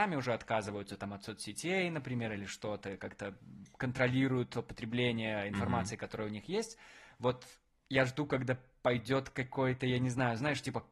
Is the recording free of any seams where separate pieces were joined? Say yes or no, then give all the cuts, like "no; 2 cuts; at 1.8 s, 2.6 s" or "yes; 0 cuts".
yes; 0 cuts